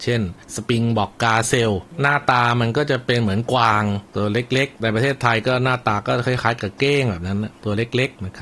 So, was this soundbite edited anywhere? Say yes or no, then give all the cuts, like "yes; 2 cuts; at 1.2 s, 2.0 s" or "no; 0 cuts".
yes; 1 cut; at 4.1 s